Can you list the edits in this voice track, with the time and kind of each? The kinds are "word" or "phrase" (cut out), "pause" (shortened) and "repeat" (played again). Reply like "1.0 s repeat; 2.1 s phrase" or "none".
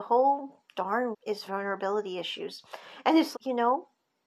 1.1 s word; 1.5 s word; 3.3 s word